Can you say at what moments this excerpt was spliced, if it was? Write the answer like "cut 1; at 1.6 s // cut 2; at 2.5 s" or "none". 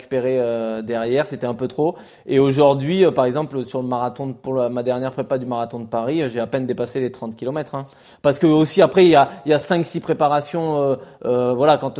none